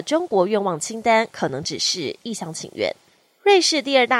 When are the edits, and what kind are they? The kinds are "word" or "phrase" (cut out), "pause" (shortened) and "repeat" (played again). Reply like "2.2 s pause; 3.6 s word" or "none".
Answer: none